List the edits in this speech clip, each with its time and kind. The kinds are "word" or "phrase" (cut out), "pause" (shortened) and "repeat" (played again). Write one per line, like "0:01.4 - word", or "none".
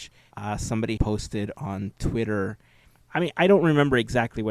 0:01.0 - word
0:01.5 - word